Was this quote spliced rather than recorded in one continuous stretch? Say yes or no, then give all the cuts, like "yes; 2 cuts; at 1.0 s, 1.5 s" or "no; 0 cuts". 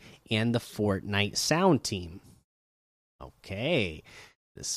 no; 0 cuts